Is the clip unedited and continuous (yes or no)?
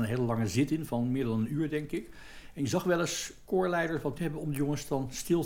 no